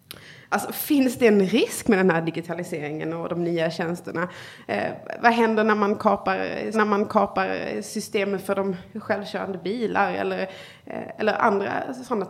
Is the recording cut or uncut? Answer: cut